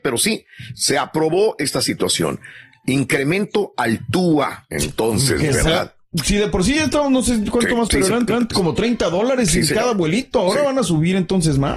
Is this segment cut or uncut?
cut